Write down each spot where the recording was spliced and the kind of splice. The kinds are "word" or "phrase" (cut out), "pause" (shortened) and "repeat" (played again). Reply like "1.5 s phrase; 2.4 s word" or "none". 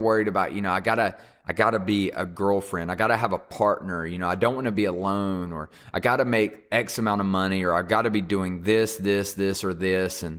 none